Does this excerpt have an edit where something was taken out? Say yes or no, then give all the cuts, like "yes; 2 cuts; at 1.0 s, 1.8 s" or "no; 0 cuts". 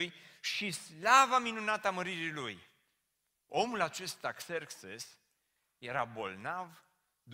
no; 0 cuts